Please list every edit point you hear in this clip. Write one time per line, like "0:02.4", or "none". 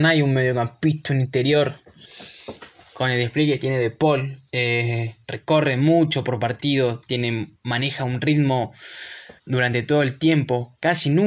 0:04.5
0:09.4